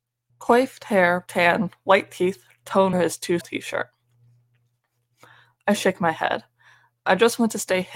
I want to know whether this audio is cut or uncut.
cut